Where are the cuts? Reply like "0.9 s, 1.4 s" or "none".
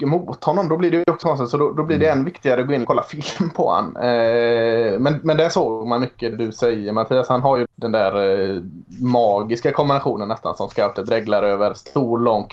1.2 s, 2.8 s, 6.3 s, 7.7 s